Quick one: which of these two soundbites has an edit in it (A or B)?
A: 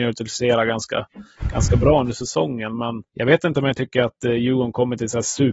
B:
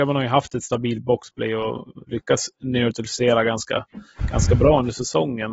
A